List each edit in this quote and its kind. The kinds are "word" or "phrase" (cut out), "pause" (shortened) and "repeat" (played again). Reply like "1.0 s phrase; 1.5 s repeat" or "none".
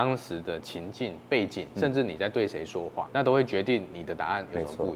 3.1 s word